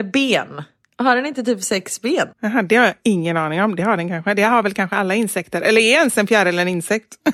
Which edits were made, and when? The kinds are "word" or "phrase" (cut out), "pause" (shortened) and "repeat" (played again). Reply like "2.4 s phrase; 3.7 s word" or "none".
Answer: 2.3 s pause